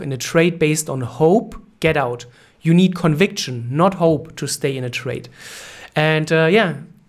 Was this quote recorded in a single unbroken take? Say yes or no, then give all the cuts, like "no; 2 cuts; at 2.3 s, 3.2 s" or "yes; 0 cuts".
yes; 0 cuts